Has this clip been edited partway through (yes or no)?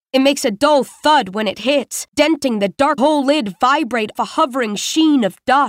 yes